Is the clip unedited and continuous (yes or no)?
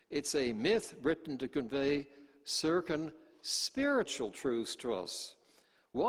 yes